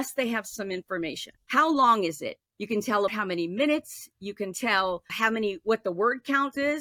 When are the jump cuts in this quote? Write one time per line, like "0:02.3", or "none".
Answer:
0:01.4
0:02.5
0:03.1
0:05.1